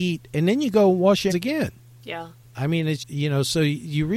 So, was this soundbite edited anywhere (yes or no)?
yes